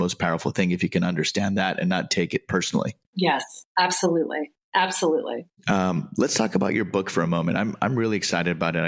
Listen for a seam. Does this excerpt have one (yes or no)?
yes